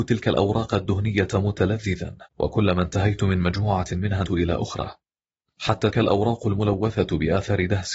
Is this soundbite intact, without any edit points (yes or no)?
no